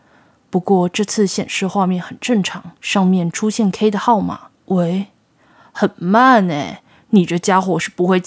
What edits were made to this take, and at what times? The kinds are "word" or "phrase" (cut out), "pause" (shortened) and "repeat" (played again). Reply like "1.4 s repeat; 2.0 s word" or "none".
2.8 s pause; 4.5 s pause